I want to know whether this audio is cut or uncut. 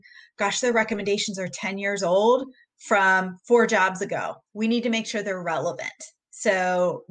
cut